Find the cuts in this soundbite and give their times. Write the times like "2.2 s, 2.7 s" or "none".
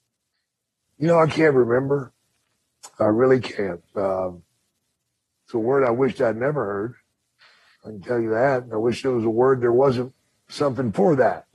none